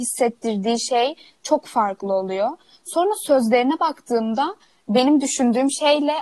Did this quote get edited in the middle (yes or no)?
no